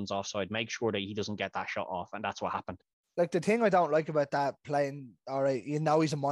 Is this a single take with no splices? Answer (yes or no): yes